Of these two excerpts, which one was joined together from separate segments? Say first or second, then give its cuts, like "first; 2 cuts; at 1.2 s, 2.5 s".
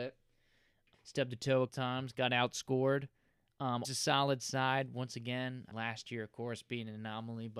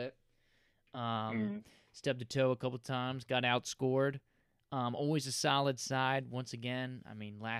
first; 4 cuts; at 0.9 s, 1.7 s, 3.8 s, 5.7 s